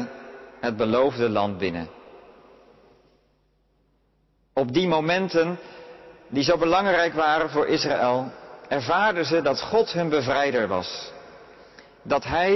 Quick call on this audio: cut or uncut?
uncut